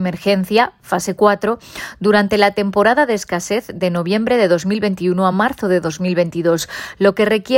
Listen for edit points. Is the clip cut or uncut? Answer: uncut